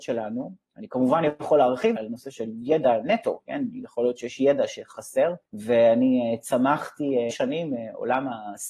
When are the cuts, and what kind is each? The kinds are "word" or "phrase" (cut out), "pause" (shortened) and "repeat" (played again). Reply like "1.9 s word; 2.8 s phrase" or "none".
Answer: 2.0 s phrase; 5.5 s pause; 7.3 s phrase